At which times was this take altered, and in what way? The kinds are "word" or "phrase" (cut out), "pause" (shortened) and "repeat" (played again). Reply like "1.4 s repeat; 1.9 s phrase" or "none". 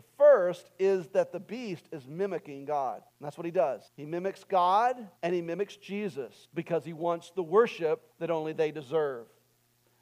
3.1 s pause; 3.9 s pause; 5.2 s pause; 6.4 s pause; 8.1 s pause